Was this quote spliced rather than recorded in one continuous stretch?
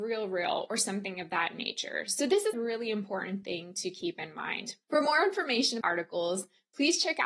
yes; 3 cuts; at 2.5 s, 4.8 s, 5.8 s

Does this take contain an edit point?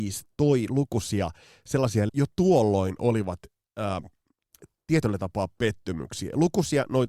yes; 1 cut; at 2.1 s

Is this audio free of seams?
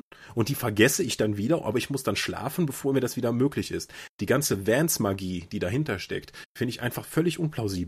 yes; 0 cuts

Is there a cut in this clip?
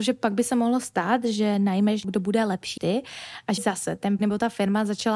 yes; 4 cuts; at 2.0 s, 2.8 s, 3.6 s, 4.2 s

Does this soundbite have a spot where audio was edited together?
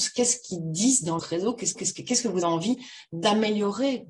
yes; 3 cuts; at 1.2 s, 1.7 s, 2.4 s

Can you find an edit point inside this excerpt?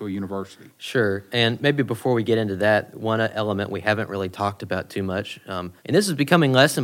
yes; 1 cut; at 5.8 s

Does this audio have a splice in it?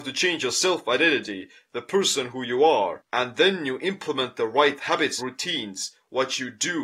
yes; 1 cut; at 5.2 s

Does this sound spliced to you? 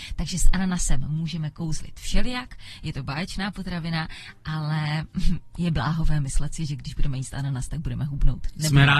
no; 0 cuts

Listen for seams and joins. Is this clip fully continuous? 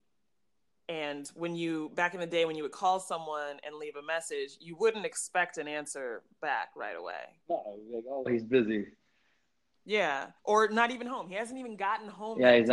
no; 1 cut; at 10.4 s

